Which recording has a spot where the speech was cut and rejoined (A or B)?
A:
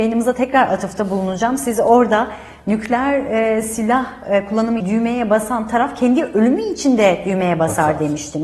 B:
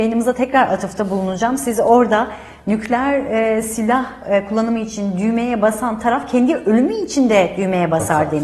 A